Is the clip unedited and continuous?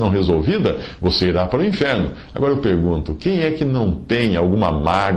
yes; 0 cuts

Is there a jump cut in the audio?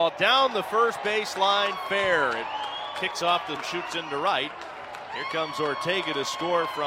yes; 1 cut; at 3.6 s

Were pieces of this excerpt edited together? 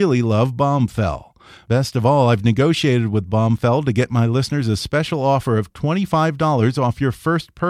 no; 0 cuts

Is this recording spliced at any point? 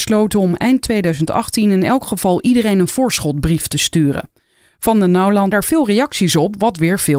yes; 1 cut; at 5.5 s

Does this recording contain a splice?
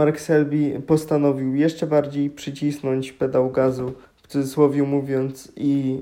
yes; 1 cut; at 4.0 s

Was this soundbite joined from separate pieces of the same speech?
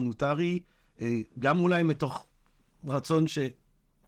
no; 0 cuts

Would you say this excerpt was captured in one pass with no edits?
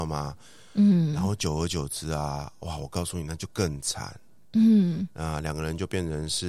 yes; 0 cuts

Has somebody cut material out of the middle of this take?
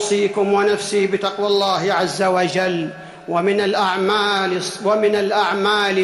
no; 0 cuts

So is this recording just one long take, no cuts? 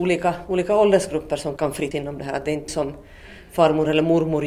no; 3 cuts; at 1.6 s, 1.9 s, 2.7 s

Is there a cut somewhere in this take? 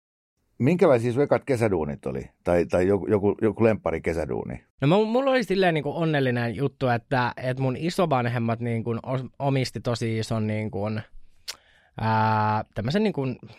yes; 1 cut; at 4.7 s

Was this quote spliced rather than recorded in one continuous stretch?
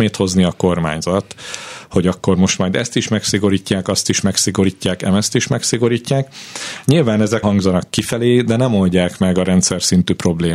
yes; 1 cut; at 7.4 s

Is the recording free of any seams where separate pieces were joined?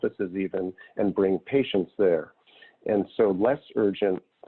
yes; 0 cuts

